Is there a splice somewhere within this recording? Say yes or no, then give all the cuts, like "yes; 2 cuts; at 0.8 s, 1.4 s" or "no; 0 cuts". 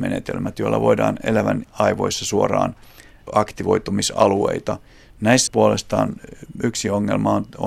yes; 3 cuts; at 1.6 s, 3.2 s, 5.5 s